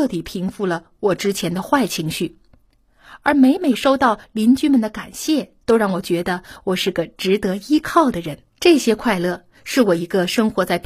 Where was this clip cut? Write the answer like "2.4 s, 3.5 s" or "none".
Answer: 5.6 s, 8.5 s